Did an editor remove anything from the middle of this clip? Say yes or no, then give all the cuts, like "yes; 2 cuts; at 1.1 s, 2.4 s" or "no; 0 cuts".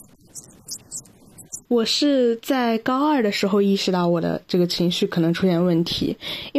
yes; 1 cut; at 1.6 s